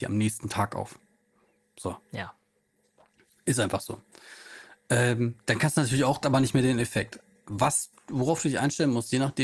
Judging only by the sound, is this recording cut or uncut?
cut